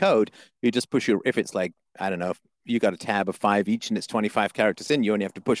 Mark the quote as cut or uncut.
uncut